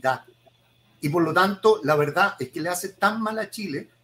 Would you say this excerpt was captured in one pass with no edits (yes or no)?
yes